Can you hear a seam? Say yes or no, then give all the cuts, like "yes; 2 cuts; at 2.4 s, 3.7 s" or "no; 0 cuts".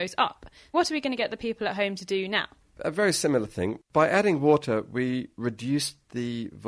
no; 0 cuts